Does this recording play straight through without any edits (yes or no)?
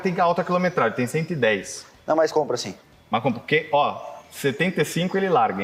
yes